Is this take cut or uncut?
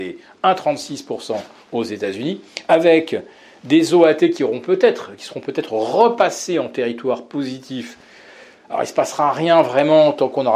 uncut